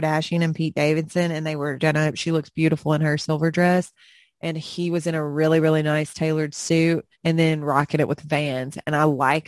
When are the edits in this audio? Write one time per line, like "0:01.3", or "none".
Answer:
0:01.8
0:07.1